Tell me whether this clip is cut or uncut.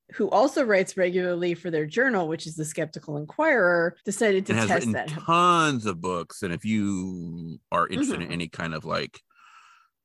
cut